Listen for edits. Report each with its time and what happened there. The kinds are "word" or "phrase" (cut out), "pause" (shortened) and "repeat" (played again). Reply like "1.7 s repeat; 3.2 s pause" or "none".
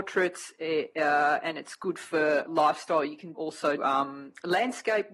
2.5 s word; 3.3 s word; 3.8 s word